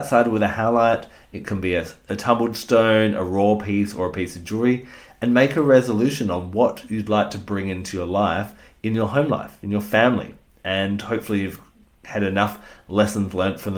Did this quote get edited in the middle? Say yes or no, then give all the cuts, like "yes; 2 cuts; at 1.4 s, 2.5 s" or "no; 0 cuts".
no; 0 cuts